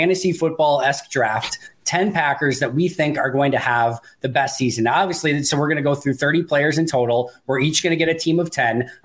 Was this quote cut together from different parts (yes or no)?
no